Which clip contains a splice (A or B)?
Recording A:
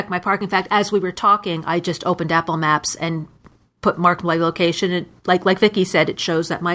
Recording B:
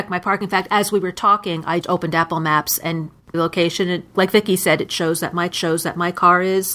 B